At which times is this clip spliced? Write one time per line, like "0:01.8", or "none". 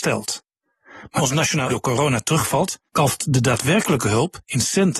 0:01.2
0:01.7
0:02.9